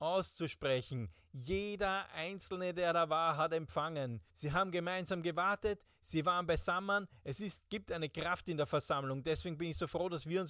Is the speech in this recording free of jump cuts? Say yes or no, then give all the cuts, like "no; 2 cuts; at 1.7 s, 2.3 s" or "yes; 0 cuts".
no; 1 cut; at 4.3 s